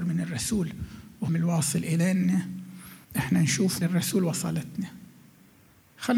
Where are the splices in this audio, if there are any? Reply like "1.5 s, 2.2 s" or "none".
1.3 s, 3.0 s, 3.8 s